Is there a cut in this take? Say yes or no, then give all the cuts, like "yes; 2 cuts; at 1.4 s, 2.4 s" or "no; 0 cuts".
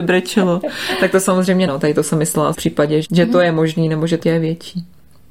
yes; 4 cuts; at 1.7 s, 2.5 s, 3.0 s, 4.2 s